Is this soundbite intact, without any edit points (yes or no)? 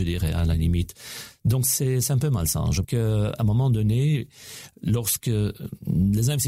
no